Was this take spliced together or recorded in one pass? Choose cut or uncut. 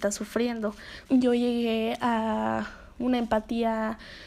cut